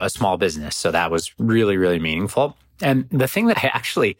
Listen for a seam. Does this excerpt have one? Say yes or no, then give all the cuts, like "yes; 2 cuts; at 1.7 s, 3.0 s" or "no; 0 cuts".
no; 0 cuts